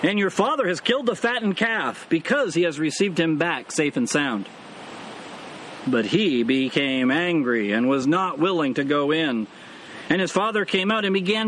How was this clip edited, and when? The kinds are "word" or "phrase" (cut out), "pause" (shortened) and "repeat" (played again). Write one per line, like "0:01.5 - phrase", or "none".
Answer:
none